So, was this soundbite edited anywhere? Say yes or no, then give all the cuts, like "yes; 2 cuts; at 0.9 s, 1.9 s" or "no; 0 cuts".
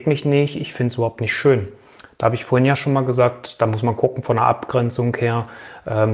no; 0 cuts